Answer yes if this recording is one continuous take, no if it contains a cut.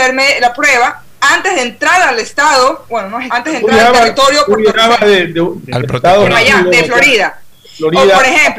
no